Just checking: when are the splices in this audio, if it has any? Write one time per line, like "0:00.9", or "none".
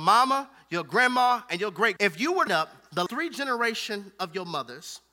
0:02.0
0:02.5
0:03.1